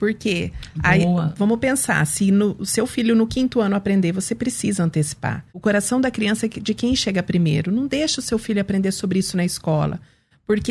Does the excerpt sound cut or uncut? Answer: cut